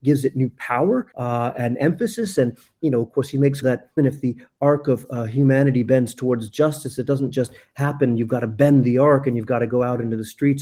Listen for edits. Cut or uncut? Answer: cut